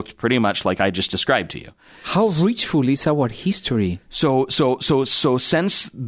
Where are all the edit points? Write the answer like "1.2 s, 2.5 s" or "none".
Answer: none